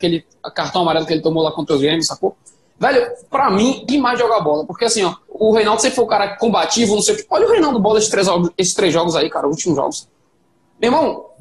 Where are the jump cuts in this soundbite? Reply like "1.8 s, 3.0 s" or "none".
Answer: 3.3 s, 3.9 s, 5.2 s, 7.7 s